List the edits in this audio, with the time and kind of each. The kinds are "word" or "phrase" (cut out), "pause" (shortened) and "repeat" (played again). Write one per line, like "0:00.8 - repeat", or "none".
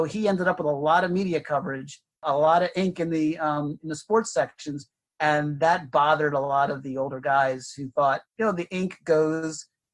0:08.3 - pause